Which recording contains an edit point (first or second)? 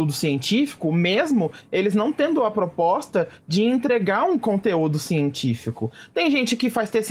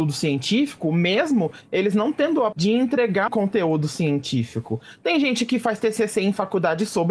second